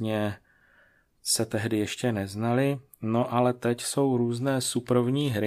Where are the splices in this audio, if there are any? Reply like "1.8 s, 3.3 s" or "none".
none